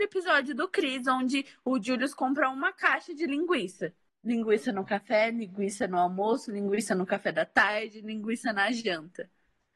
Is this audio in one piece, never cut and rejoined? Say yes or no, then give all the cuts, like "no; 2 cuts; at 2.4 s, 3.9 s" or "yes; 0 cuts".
yes; 0 cuts